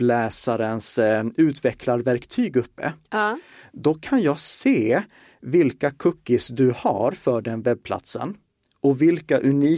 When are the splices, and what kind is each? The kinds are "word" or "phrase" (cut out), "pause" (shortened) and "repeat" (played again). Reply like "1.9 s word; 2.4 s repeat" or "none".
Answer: none